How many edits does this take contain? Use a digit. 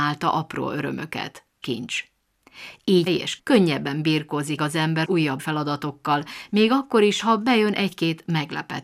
6